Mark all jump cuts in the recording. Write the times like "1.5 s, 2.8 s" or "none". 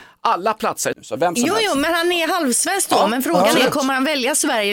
0.9 s